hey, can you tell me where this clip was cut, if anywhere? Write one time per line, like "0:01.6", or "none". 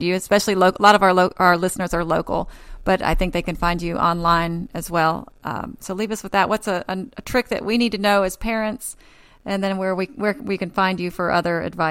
none